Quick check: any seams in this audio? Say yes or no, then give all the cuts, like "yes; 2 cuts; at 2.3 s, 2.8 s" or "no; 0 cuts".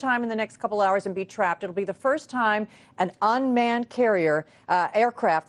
no; 0 cuts